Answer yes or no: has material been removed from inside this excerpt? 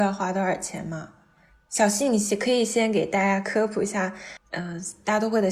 no